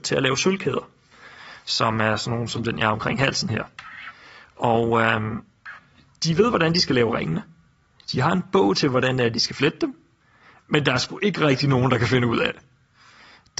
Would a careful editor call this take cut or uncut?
uncut